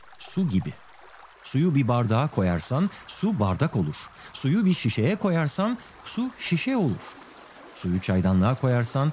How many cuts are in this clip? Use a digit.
1